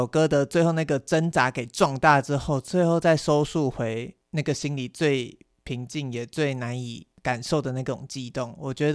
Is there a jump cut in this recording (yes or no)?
no